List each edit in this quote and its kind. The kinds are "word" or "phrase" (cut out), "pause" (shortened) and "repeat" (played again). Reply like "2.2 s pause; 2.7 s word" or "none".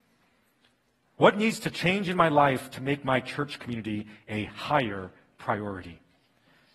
none